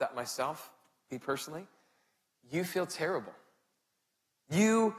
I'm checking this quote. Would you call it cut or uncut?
uncut